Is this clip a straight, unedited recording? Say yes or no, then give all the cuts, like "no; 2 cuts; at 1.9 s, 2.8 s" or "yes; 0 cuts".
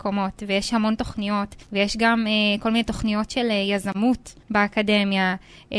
no; 2 cuts; at 1.6 s, 4.4 s